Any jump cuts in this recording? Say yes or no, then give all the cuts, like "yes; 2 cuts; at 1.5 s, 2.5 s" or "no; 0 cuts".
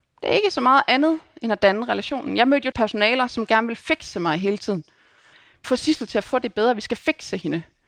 yes; 2 cuts; at 2.7 s, 5.6 s